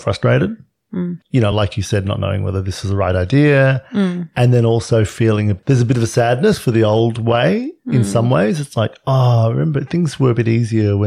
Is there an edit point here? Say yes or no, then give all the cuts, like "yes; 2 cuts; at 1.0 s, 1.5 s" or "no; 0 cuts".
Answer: no; 0 cuts